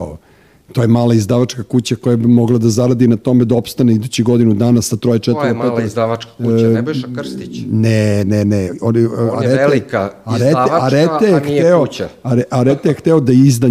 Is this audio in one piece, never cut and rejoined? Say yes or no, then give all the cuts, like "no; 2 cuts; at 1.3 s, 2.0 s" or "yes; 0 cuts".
yes; 0 cuts